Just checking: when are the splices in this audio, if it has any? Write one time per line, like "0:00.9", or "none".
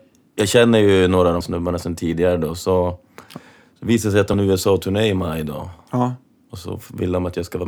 0:01.4
0:04.3